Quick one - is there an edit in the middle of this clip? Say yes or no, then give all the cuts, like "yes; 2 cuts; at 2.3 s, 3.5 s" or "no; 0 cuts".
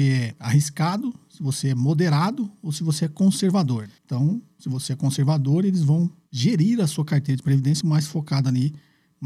yes; 2 cuts; at 4.0 s, 7.8 s